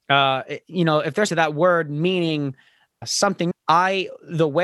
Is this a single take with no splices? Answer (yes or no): no